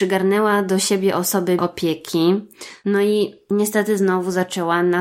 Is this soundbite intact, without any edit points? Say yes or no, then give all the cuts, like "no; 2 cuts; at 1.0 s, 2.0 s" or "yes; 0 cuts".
no; 1 cut; at 1.6 s